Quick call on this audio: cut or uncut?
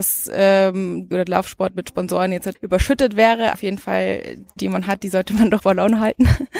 cut